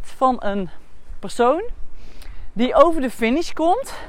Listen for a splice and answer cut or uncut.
uncut